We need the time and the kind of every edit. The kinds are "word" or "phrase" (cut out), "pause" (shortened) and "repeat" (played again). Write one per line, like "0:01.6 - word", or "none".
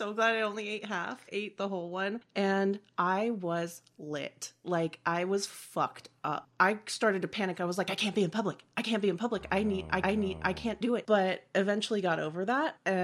0:01.3 - word
0:10.0 - repeat